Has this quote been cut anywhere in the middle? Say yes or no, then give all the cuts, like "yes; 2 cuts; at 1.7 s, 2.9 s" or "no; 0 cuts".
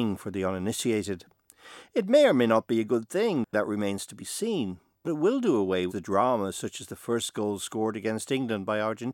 yes; 3 cuts; at 3.5 s, 5.0 s, 5.9 s